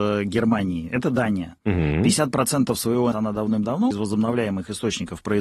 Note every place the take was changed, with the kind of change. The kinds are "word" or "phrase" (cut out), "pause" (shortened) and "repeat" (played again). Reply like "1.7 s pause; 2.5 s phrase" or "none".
3.1 s word; 3.9 s word